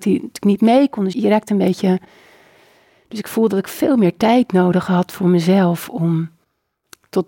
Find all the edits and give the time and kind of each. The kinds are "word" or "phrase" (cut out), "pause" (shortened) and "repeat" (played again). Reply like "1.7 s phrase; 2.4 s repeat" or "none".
1.1 s word